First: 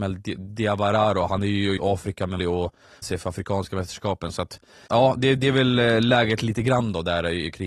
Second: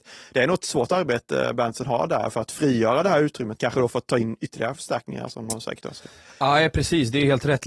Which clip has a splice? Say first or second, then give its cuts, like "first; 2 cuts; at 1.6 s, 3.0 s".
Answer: first; 4 cuts; at 1.8 s, 2.4 s, 3.0 s, 4.9 s